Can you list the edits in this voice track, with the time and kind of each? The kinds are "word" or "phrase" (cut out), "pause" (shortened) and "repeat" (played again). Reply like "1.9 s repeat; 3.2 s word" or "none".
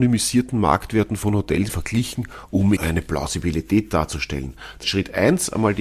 1.7 s phrase; 2.8 s word; 4.8 s word